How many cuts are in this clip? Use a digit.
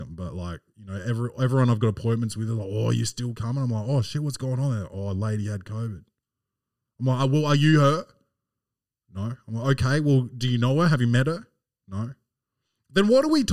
0